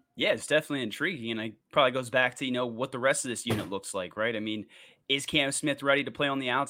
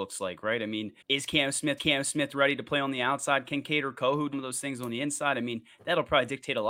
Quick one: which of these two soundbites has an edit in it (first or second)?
second